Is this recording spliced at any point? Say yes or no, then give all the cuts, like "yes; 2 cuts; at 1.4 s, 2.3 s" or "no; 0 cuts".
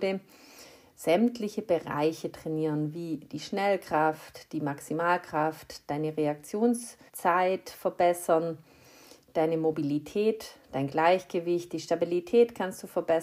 yes; 1 cut; at 7.1 s